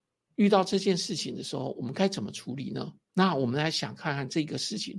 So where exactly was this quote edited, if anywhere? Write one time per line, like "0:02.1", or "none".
0:03.0